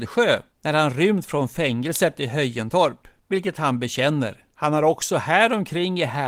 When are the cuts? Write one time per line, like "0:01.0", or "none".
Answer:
0:04.5